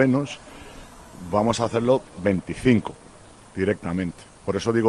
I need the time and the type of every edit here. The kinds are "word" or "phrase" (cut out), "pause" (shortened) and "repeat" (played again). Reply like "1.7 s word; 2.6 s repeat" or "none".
none